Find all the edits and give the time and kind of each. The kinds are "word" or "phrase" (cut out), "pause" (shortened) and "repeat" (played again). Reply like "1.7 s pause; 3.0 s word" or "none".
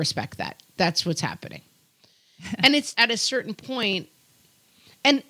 2.9 s word

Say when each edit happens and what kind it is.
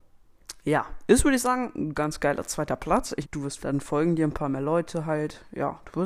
3.2 s word; 3.6 s word

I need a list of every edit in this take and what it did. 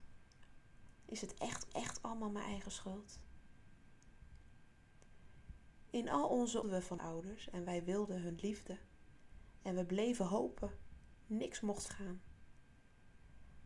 1.7 s repeat; 6.6 s phrase; 7.0 s word; 11.9 s word

